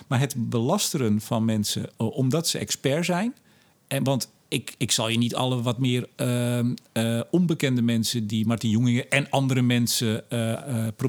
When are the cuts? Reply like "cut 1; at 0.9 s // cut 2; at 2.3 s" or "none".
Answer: none